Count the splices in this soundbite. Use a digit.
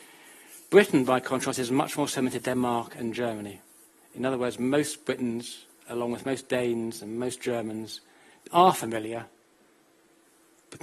0